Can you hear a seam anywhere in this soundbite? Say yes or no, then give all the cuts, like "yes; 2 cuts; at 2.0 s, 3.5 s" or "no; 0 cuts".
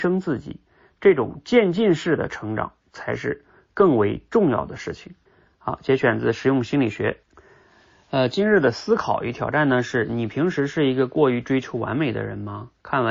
yes; 2 cuts; at 5.3 s, 7.2 s